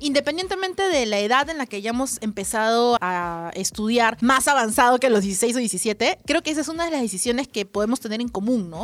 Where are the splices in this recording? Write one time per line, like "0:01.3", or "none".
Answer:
0:03.0